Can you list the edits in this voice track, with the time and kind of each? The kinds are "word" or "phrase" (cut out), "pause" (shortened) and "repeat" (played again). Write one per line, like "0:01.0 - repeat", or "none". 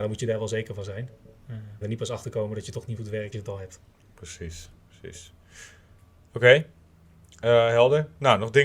0:01.8 - word
0:03.0 - word
0:03.3 - word